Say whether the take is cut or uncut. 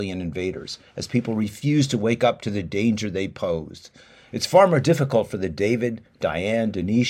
uncut